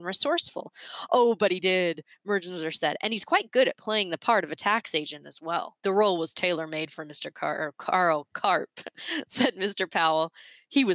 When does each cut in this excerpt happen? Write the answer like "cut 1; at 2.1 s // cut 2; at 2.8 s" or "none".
cut 1; at 5.8 s